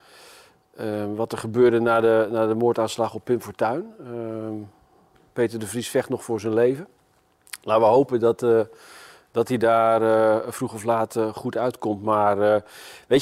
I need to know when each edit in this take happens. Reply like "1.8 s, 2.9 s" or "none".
none